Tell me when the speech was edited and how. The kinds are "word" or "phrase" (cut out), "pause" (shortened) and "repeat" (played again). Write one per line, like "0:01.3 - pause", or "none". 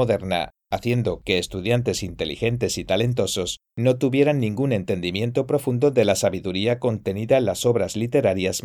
none

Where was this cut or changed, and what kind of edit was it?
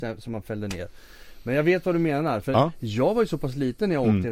none

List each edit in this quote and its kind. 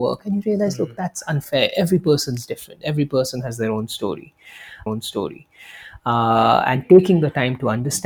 0:04.9 - repeat

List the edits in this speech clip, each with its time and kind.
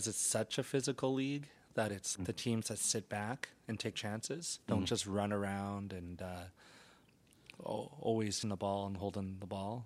0:02.1 - word
0:03.9 - word
0:04.6 - pause
0:08.4 - phrase

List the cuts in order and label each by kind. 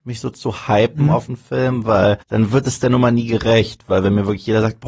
0:02.2 - pause

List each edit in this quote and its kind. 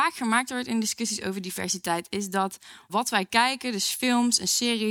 0:02.9 - word

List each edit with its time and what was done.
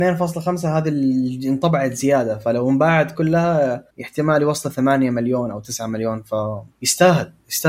0:03.9 - pause
0:06.7 - pause

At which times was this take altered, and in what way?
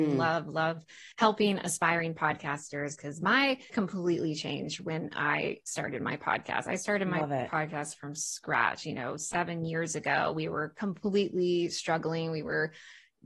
0:01.1 - pause
0:03.7 - phrase

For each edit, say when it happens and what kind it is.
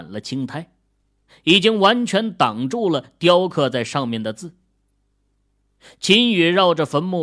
none

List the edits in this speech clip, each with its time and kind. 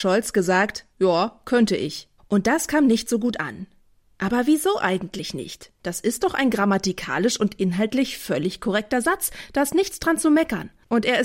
0:00.9 - pause
0:02.2 - pause

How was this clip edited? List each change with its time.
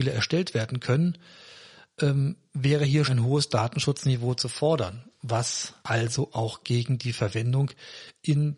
0:03.0 - word
0:05.8 - pause

